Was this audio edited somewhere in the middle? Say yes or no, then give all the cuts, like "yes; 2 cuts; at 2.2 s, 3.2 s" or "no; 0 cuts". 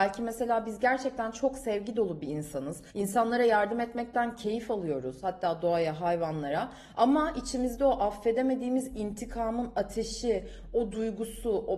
yes; 1 cut; at 2.9 s